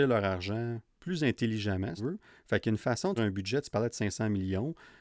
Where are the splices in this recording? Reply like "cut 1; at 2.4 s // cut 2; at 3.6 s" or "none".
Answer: cut 1; at 1.0 s // cut 2; at 2.0 s // cut 3; at 3.2 s